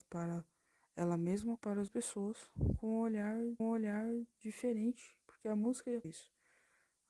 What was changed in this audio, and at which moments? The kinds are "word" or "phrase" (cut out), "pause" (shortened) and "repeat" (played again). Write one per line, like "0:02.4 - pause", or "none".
0:01.6 - word
0:01.9 - word
0:03.6 - repeat
0:06.0 - word

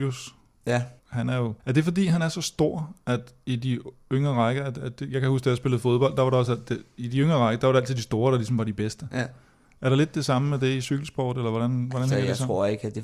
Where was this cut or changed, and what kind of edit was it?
0:01.0 - pause
0:01.6 - pause

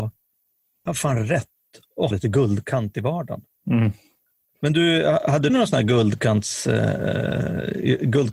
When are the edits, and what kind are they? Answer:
0:02.1 - word
0:05.5 - word

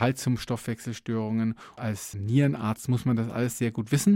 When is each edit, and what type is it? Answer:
0:01.8 - word
0:02.1 - word

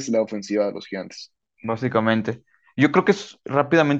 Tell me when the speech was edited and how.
none

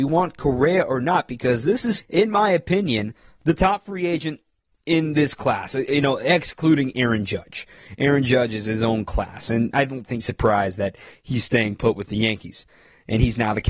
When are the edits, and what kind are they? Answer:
0:02.0 - word
0:10.2 - word

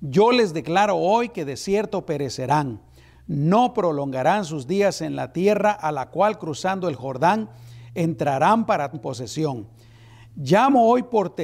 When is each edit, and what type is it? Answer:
0:08.9 - word

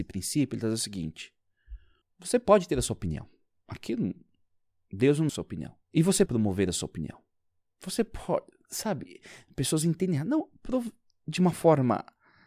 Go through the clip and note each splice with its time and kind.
0:02.0 - pause
0:05.3 - phrase
0:05.8 - pause
0:06.3 - word

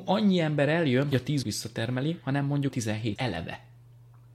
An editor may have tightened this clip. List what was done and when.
0:01.1 - phrase
0:01.4 - word
0:02.7 - word
0:03.2 - word

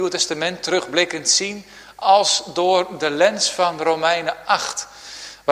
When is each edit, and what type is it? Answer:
none

